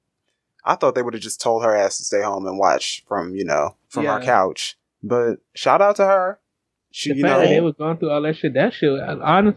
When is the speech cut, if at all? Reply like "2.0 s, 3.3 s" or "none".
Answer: 3.8 s, 6.8 s

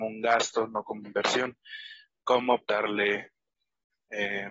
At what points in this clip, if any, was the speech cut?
1.0 s, 2.6 s

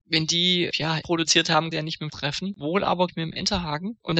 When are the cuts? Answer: 1.0 s, 1.7 s, 2.1 s, 3.1 s

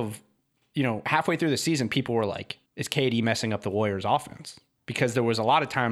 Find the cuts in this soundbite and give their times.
2.7 s

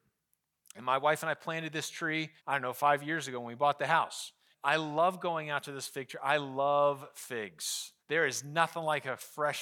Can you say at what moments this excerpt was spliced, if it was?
2.4 s, 4.5 s, 8.0 s

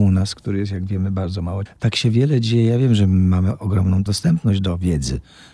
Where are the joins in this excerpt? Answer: 1.7 s, 4.1 s

